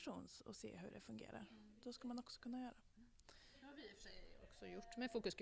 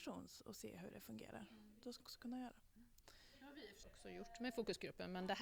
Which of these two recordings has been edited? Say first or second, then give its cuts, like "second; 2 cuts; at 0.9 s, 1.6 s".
second; 2 cuts; at 2.0 s, 3.8 s